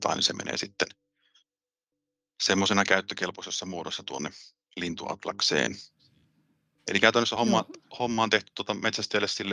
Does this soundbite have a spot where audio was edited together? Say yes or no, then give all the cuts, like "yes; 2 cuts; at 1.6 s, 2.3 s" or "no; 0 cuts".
no; 0 cuts